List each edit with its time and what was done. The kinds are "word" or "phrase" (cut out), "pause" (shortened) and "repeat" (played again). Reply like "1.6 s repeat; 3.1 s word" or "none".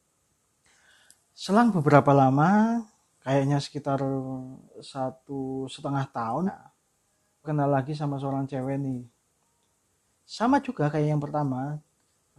4.7 s pause; 6.5 s word; 7.4 s word